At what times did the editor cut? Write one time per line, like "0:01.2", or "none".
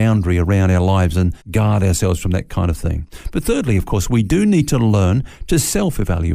0:01.4